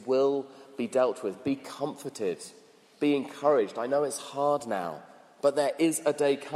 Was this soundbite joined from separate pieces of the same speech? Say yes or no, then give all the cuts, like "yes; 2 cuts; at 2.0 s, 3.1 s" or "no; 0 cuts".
no; 0 cuts